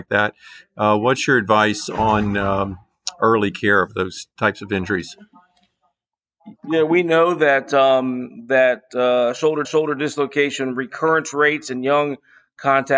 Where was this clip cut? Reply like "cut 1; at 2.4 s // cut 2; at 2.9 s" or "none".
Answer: cut 1; at 4.3 s // cut 2; at 6.6 s // cut 3; at 9.6 s